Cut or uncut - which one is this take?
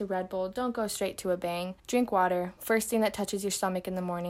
cut